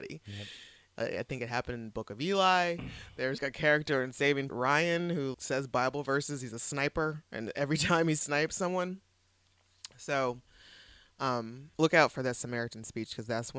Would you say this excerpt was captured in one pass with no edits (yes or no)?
no